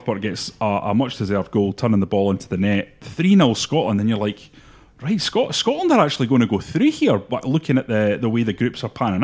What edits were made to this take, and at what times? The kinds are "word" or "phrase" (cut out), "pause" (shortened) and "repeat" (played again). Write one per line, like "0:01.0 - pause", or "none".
none